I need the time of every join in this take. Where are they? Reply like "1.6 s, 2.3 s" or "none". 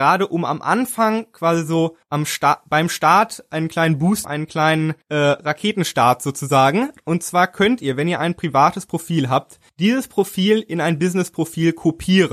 2.0 s, 4.2 s, 5.0 s, 9.7 s